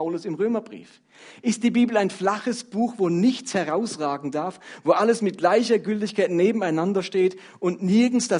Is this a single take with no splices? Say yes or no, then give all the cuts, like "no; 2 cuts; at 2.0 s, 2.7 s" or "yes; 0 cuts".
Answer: yes; 0 cuts